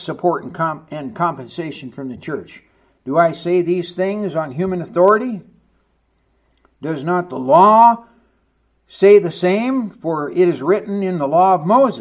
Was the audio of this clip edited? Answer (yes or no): no